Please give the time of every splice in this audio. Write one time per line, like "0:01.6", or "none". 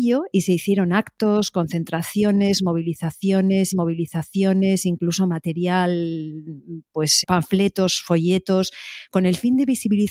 0:03.7
0:07.2